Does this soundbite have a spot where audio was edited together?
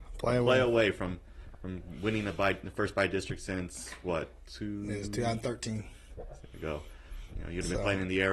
no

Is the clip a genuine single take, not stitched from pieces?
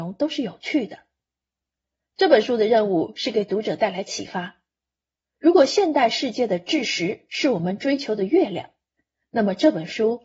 yes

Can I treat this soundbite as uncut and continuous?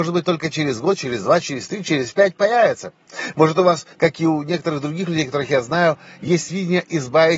no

